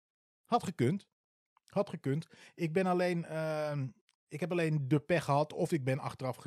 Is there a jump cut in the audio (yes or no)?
no